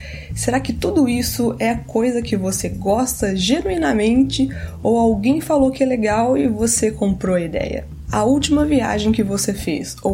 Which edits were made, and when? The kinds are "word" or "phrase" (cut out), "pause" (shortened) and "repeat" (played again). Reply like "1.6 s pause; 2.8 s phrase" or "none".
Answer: none